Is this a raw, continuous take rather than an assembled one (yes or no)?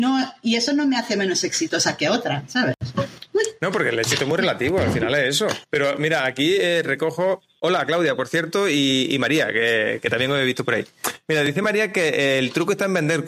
no